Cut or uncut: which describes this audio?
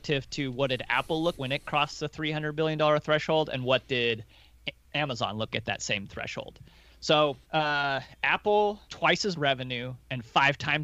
cut